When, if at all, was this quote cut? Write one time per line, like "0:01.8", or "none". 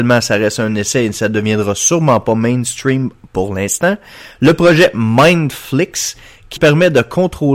0:06.6